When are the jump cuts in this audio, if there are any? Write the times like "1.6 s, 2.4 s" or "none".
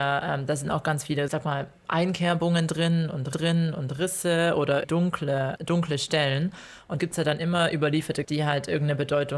1.3 s, 3.3 s, 4.8 s, 5.6 s, 7.0 s, 8.2 s